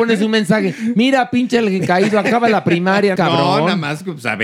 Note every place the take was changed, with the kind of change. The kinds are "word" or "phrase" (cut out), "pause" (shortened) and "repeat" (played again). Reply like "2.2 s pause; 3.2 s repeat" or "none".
3.2 s phrase